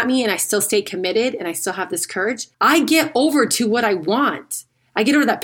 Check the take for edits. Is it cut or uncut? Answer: cut